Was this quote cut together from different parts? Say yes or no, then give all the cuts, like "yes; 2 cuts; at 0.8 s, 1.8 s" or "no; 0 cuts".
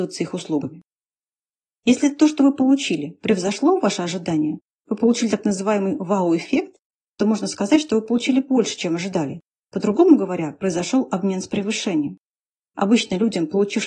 no; 0 cuts